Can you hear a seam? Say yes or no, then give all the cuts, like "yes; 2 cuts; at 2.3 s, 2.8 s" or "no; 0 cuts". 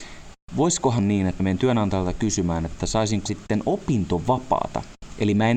yes; 3 cuts; at 1.0 s, 1.4 s, 3.3 s